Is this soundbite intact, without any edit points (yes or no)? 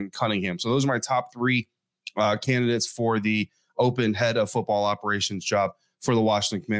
yes